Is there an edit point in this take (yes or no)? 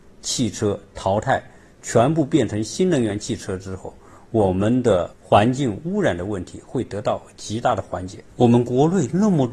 yes